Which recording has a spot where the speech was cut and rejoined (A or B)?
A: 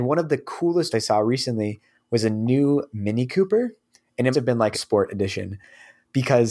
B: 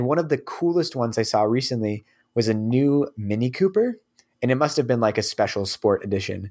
A